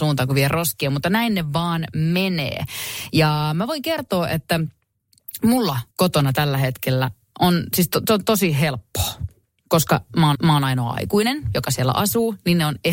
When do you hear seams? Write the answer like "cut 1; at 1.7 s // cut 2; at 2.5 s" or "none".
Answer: cut 1; at 5.9 s // cut 2; at 10.3 s